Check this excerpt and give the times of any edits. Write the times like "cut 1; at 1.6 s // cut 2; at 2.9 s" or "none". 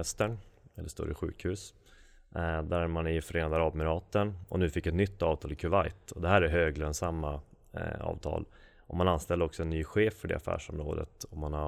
none